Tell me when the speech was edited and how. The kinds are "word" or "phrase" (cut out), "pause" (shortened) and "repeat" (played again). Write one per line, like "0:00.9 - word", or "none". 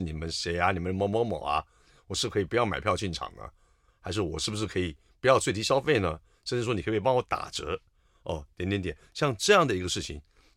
none